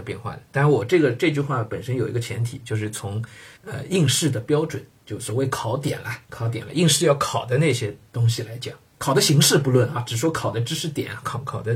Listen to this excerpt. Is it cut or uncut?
cut